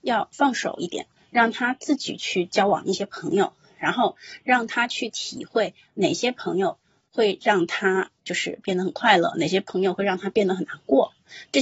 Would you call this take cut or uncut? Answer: uncut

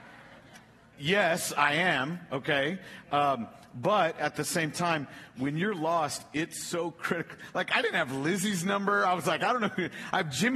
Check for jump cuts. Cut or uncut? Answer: uncut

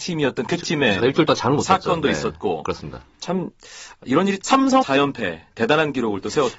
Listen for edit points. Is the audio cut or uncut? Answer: cut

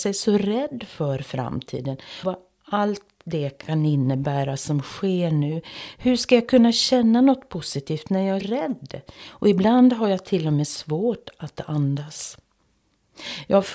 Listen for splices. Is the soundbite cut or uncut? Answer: cut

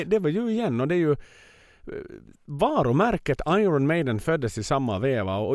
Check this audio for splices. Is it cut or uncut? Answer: uncut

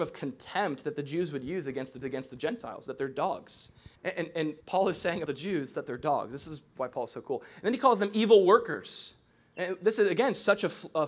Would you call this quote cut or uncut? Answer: cut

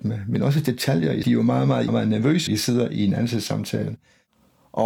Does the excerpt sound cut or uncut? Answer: cut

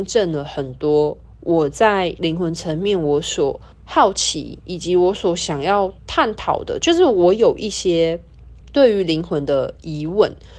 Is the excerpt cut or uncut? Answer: cut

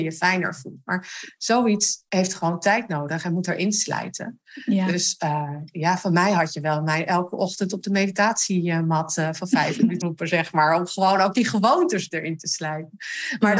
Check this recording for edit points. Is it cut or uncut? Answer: cut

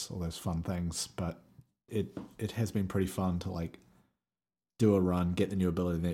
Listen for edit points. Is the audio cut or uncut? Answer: cut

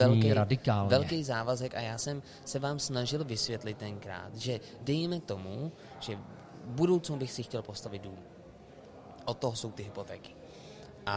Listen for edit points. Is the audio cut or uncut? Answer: uncut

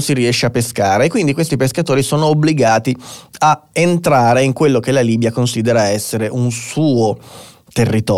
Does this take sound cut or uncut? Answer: uncut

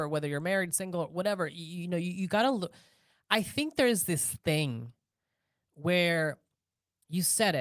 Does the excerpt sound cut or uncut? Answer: uncut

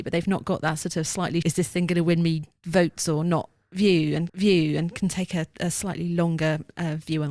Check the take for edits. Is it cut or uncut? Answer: cut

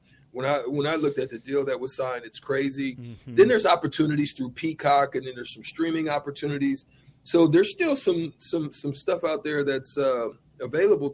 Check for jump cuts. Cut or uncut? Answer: uncut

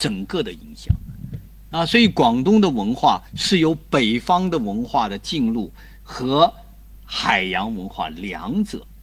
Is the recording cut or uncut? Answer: cut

